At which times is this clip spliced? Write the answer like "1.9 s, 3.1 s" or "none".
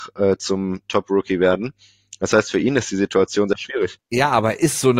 none